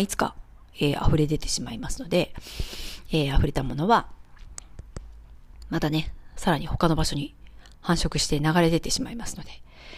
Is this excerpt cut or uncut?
uncut